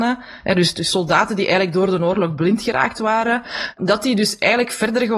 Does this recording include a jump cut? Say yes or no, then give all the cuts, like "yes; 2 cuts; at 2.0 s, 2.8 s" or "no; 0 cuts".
yes; 1 cut; at 3.8 s